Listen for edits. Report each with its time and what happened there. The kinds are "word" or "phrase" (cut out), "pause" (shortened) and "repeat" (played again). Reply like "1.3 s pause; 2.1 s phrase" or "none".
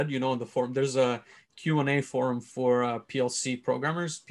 none